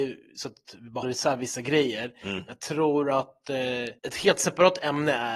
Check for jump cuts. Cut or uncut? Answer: cut